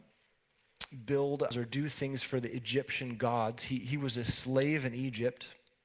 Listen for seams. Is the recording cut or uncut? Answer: cut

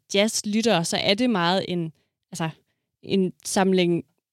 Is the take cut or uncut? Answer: uncut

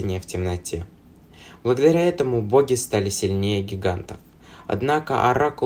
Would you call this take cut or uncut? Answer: uncut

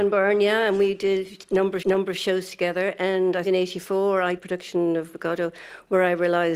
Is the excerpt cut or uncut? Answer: cut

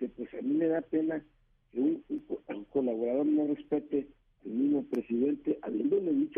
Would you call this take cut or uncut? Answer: uncut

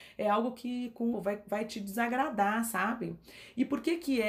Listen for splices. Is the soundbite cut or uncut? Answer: cut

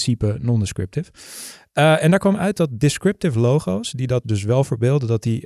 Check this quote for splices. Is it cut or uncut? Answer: cut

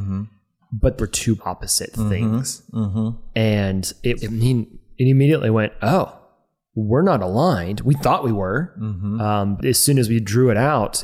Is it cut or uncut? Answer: cut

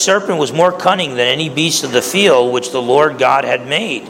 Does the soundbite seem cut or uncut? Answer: uncut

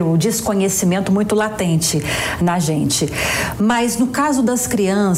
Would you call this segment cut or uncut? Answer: uncut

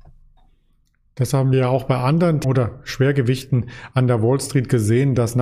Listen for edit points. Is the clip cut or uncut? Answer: cut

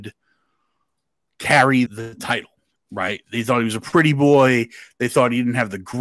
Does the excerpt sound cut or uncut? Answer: cut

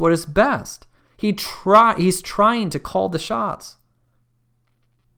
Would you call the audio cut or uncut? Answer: cut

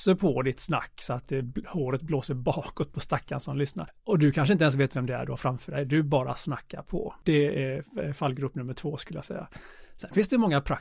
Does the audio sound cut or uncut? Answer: uncut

